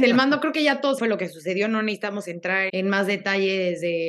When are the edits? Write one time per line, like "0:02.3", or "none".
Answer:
0:01.0
0:02.7